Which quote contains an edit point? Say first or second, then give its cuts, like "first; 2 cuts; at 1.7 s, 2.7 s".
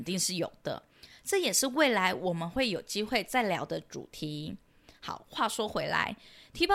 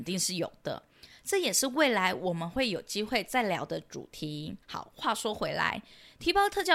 second; 1 cut; at 4.6 s